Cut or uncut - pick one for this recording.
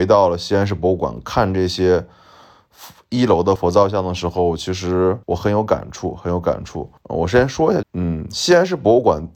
cut